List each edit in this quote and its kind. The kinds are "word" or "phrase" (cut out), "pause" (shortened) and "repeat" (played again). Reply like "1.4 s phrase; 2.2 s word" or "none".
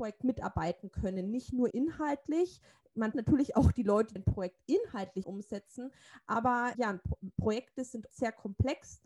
1.7 s word; 3.1 s word; 4.2 s word; 5.2 s phrase; 6.7 s word; 8.1 s word